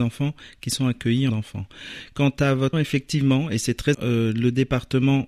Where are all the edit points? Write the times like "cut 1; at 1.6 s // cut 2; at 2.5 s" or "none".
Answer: cut 1; at 1.3 s // cut 2; at 2.7 s // cut 3; at 3.9 s